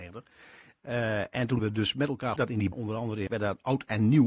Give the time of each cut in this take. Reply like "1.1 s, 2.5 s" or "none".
1.6 s, 2.4 s, 2.7 s, 3.3 s